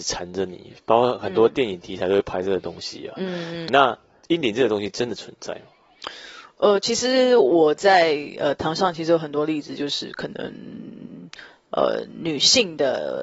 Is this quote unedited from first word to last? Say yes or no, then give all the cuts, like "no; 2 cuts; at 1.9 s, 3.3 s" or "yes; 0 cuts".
no; 1 cut; at 3.7 s